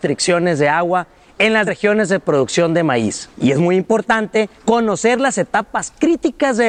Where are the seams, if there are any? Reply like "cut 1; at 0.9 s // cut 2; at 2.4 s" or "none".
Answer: cut 1; at 1.7 s // cut 2; at 3.3 s // cut 3; at 4.6 s